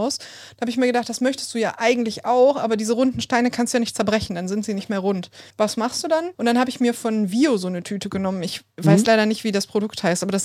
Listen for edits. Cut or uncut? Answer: cut